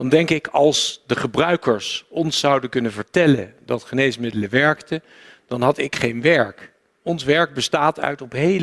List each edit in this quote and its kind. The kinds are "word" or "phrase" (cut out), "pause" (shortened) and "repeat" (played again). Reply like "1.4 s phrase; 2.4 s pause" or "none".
none